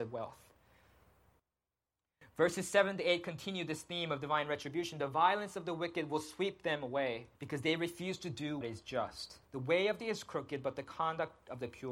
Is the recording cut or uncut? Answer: cut